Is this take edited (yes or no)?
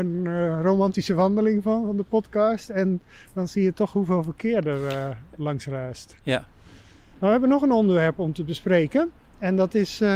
no